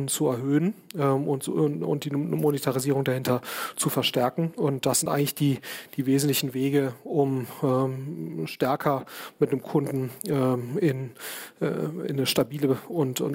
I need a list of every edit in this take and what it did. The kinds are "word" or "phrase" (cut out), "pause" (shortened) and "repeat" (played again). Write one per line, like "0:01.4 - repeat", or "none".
none